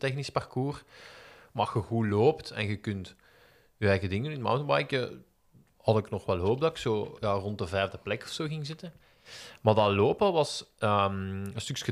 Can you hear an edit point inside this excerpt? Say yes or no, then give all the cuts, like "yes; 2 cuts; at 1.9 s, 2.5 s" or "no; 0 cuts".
no; 0 cuts